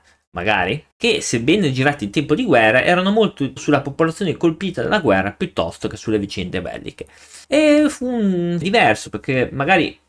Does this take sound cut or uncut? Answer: cut